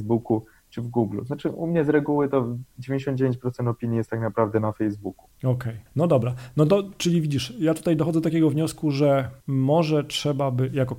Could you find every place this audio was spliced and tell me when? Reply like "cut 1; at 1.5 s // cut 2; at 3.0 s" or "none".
cut 1; at 2.7 s // cut 2; at 5.3 s // cut 3; at 5.9 s // cut 4; at 9.4 s